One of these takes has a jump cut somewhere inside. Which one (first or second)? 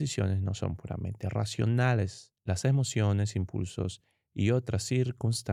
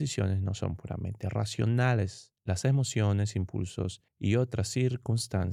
second